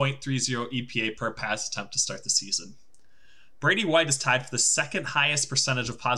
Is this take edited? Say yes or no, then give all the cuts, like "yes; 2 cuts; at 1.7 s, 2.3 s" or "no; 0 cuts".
no; 0 cuts